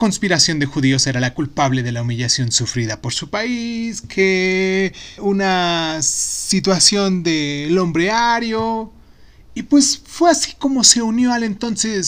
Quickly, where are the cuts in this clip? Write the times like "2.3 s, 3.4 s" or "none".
5.2 s